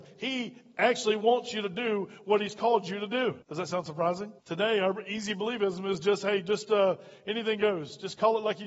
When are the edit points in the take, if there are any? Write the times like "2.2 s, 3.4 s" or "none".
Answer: 3.4 s, 4.4 s